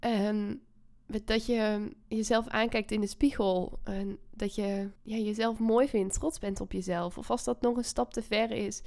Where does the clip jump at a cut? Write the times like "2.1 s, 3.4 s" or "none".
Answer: 2.0 s, 4.9 s